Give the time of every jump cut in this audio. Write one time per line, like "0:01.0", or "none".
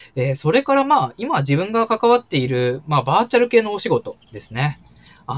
0:04.2